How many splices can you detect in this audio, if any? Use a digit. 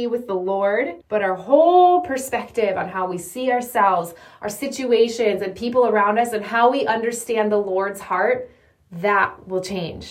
1